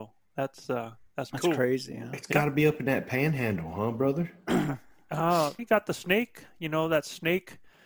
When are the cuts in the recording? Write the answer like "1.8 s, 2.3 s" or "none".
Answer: 1.3 s, 5.6 s